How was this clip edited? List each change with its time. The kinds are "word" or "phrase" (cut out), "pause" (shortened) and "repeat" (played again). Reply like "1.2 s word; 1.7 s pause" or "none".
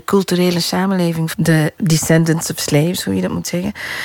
1.3 s word; 1.8 s word